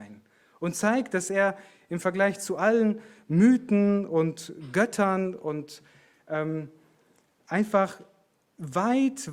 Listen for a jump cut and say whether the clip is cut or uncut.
uncut